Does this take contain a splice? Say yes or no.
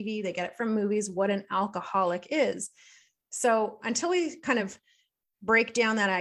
no